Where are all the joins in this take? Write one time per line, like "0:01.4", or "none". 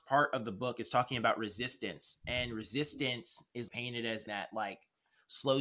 0:03.7
0:04.3

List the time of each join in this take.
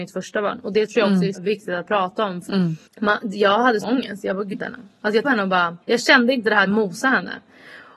0:01.3
0:02.5
0:02.9
0:03.8
0:04.5
0:05.2
0:05.8
0:06.7

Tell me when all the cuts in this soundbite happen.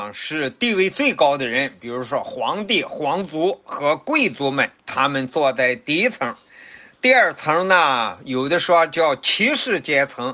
0:04.8

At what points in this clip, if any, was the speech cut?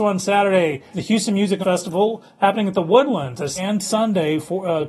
0:00.9
0:01.6
0:03.6

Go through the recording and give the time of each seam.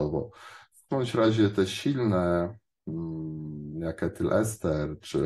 0:00.9

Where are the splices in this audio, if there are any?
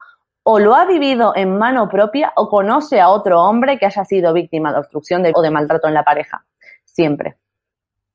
0:05.3

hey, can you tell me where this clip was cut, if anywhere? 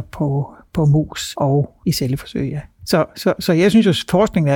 none

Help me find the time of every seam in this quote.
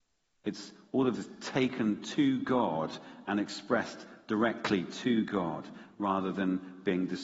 0:01.1

